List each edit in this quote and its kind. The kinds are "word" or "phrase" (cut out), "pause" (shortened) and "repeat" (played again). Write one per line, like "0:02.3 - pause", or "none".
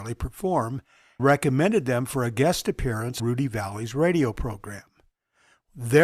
0:01.2 - word
0:03.2 - word